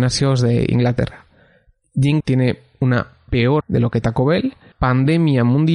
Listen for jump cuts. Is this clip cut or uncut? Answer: cut